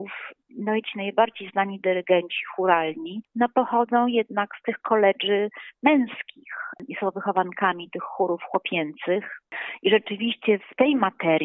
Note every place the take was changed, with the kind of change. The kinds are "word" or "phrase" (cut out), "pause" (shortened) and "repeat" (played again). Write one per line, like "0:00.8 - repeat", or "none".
none